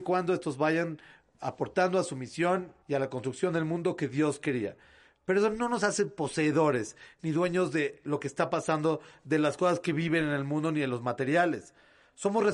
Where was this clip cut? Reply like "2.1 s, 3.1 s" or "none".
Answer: 2.8 s